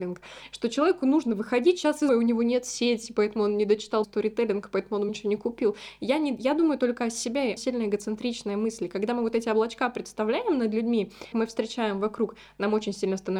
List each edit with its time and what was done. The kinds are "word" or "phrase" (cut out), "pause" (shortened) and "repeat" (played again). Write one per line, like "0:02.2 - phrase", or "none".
0:02.1 - word
0:04.0 - word
0:05.1 - word
0:07.6 - word
0:11.3 - word